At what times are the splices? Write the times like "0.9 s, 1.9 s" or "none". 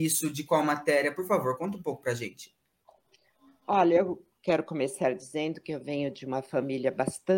none